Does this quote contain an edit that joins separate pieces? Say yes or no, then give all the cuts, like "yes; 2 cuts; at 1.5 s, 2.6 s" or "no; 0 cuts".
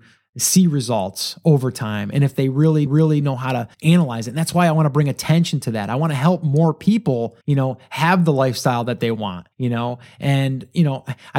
yes; 4 cuts; at 2.9 s, 3.7 s, 7.4 s, 9.5 s